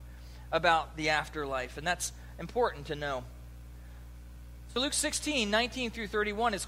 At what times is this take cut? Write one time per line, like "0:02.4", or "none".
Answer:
none